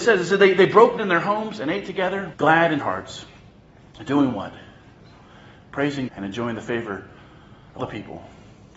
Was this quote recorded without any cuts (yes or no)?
no